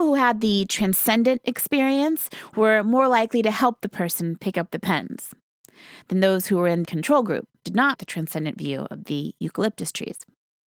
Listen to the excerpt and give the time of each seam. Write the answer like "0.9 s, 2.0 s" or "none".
6.8 s, 7.6 s, 7.9 s